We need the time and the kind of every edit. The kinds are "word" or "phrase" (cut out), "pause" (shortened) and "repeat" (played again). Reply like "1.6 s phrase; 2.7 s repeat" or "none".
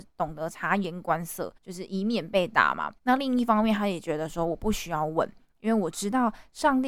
1.6 s pause; 3.0 s pause